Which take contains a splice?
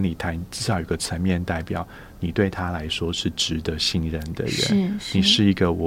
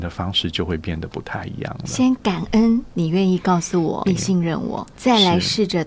second; 2 cuts; at 4.0 s, 4.9 s

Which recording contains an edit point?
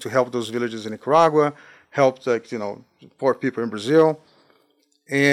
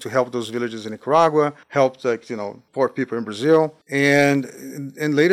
second; 3 cuts; at 1.6 s, 2.7 s, 3.8 s

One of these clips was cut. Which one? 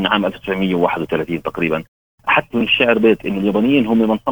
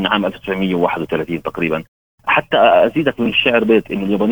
first; 1 cut; at 2.5 s

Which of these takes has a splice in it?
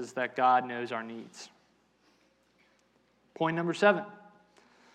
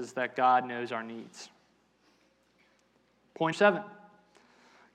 second; 1 cut; at 3.5 s

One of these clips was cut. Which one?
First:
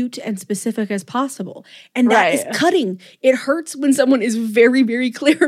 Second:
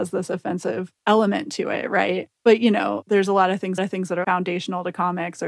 second; 1 cut; at 3.8 s

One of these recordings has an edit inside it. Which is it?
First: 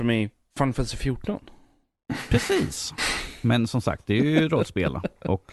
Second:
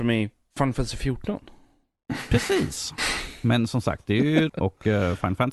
second; 1 cut; at 4.5 s

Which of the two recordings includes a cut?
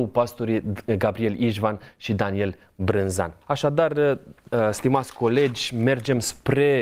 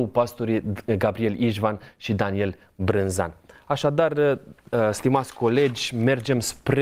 first; 1 cut; at 3.4 s

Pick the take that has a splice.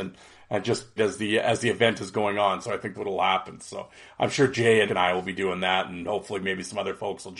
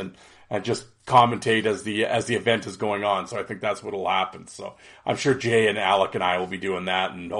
first; 3 cuts; at 1.0 s, 2.9 s, 4.9 s

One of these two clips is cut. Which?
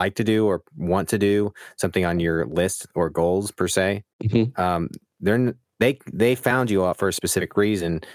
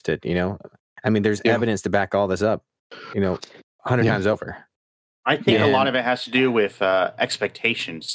first; 1 cut; at 4.1 s

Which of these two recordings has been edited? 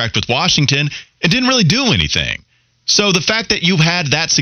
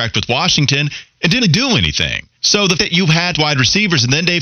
second; 4 cuts; at 1.4 s, 2.4 s, 2.8 s, 3.3 s

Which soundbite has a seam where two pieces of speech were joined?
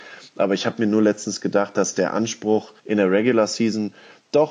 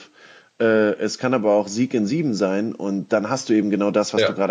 first; 1 cut; at 2.8 s

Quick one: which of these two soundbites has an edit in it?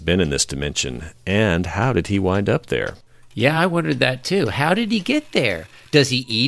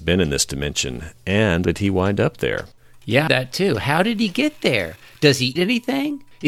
second; 3 cuts; at 1.6 s, 3.3 s, 5.6 s

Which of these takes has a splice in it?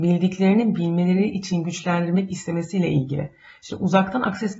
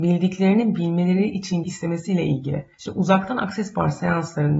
second; 2 cuts; at 1.6 s, 2.7 s

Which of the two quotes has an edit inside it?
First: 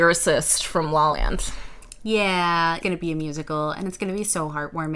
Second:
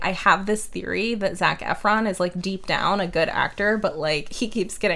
first; 2 cuts; at 1.1 s, 2.8 s

